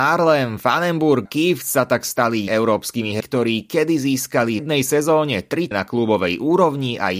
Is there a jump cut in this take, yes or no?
yes